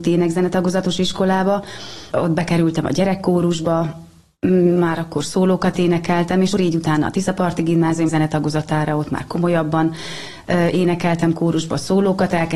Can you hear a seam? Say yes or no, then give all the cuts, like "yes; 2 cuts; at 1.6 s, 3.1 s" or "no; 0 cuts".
yes; 3 cuts; at 2.1 s, 6.5 s, 8.1 s